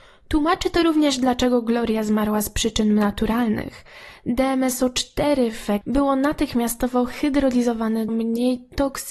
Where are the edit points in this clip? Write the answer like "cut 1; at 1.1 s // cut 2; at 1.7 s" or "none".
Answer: cut 1; at 5.8 s // cut 2; at 8.1 s